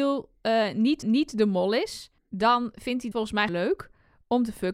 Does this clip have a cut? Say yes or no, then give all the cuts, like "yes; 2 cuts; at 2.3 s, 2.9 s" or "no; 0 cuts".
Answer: yes; 4 cuts; at 1.0 s, 2.2 s, 3.1 s, 3.5 s